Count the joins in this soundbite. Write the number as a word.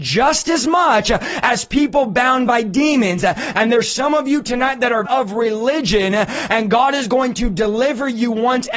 one